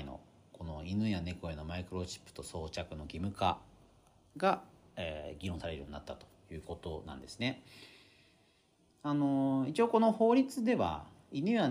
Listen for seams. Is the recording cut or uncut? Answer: uncut